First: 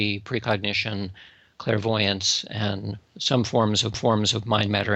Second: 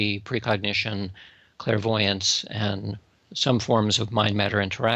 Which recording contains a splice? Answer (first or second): first